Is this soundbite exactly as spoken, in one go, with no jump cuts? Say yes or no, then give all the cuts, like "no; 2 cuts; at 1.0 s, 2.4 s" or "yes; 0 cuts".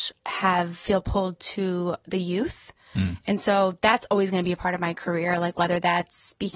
yes; 0 cuts